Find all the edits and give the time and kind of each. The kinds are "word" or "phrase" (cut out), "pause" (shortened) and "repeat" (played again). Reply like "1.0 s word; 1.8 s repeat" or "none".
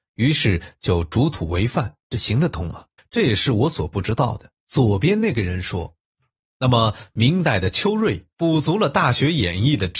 2.0 s pause; 3.0 s pause; 4.6 s pause; 6.1 s pause; 8.3 s pause

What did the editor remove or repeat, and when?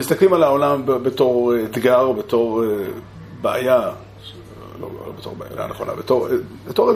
5.6 s word

